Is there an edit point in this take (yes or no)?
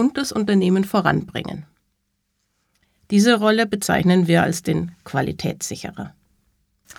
no